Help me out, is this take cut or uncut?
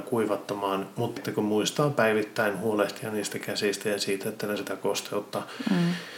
cut